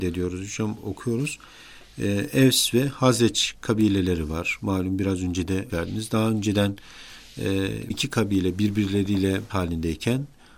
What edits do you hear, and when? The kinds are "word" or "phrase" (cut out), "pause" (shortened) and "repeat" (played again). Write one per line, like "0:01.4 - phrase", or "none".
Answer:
0:05.7 - word
0:07.9 - word
0:09.5 - word